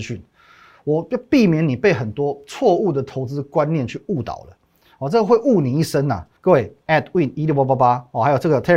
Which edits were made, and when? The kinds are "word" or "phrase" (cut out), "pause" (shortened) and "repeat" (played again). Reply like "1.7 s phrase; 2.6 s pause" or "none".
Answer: 6.4 s pause; 6.8 s pause